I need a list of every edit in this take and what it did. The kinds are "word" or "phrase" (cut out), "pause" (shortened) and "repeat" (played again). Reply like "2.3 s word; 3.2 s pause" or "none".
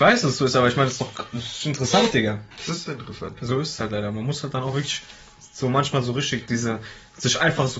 none